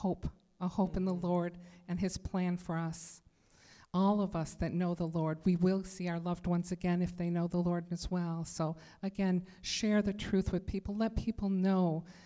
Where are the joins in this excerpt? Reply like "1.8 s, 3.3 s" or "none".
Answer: none